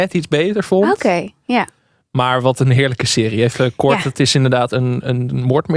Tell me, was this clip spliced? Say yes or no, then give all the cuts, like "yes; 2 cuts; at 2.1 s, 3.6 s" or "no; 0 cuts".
no; 0 cuts